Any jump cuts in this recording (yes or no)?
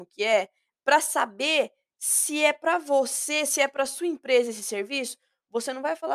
no